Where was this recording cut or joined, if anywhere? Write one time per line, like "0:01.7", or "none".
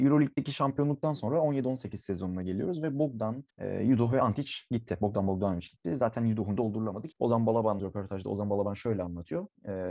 0:06.6
0:07.1
0:07.8